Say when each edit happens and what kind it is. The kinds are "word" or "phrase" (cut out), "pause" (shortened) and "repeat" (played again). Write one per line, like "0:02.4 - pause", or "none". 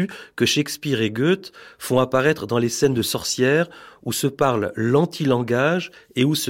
none